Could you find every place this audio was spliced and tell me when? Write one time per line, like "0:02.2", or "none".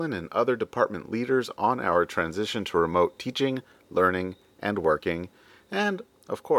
none